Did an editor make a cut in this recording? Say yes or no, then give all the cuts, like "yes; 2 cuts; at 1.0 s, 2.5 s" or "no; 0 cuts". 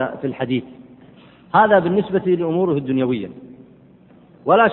no; 0 cuts